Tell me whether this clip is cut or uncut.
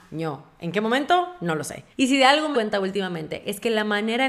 cut